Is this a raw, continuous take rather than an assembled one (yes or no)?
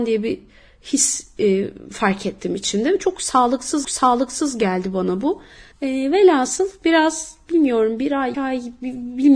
no